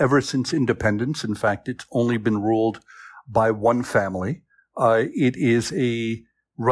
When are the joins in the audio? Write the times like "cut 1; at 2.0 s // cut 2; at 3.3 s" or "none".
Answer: none